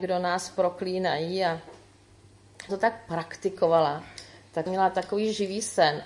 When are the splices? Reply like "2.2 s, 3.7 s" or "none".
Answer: 2.7 s, 4.7 s